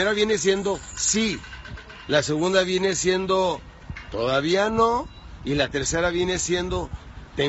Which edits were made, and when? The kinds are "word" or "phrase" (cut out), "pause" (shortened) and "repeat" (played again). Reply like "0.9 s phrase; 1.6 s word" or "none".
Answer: none